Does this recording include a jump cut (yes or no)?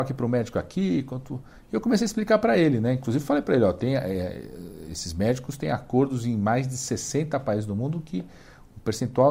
no